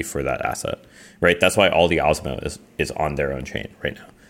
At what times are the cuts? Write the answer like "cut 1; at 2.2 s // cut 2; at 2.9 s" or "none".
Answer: none

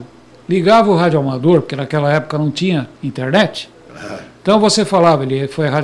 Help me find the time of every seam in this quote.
cut 1; at 2.9 s

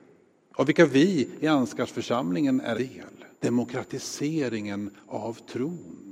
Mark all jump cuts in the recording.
cut 1; at 2.7 s // cut 2; at 3.3 s

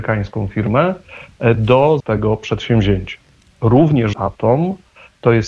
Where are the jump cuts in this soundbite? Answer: cut 1; at 2.0 s // cut 2; at 4.1 s

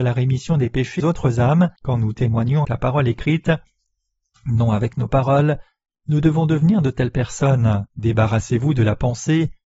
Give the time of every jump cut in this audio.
cut 1; at 1.0 s // cut 2; at 1.8 s // cut 3; at 2.6 s // cut 4; at 5.1 s // cut 5; at 7.9 s

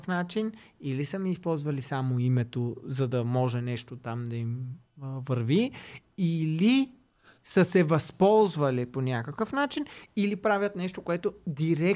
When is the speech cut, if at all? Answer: none

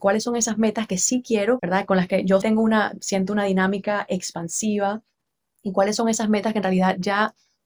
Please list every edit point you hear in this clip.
cut 1; at 1.6 s // cut 2; at 2.4 s

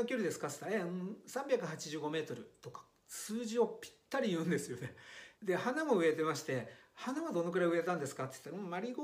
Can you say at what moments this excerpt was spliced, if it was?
cut 1; at 5.3 s

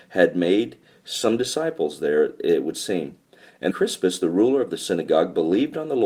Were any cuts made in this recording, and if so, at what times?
cut 1; at 3.7 s

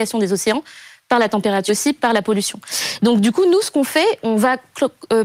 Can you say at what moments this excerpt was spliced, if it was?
cut 1; at 1.7 s // cut 2; at 4.2 s

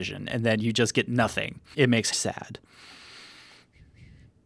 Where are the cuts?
cut 1; at 1.7 s // cut 2; at 2.1 s

